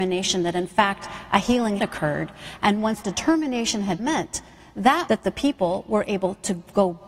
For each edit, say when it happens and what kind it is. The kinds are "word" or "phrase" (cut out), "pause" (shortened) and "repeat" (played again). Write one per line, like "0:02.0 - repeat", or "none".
0:01.8 - word
0:03.0 - word
0:04.0 - word
0:05.1 - word

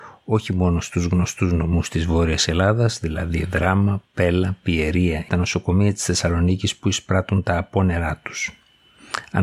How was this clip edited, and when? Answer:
0:05.3 - phrase

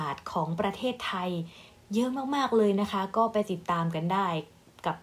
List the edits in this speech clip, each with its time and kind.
none

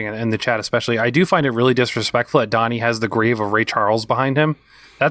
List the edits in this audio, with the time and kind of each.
none

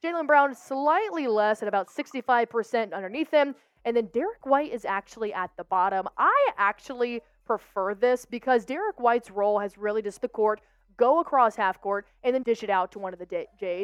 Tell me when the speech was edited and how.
0:10.2 - phrase
0:12.4 - word

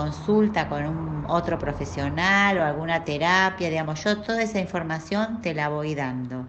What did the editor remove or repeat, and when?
none

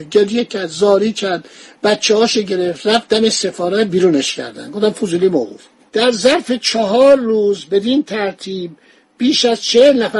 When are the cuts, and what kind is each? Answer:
none

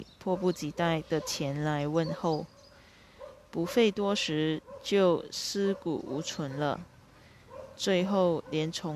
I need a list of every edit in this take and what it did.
none

